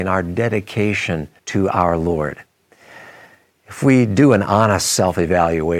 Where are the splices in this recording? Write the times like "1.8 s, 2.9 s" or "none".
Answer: 1.4 s